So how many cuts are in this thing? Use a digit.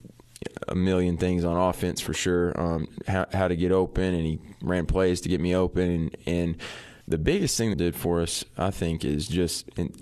2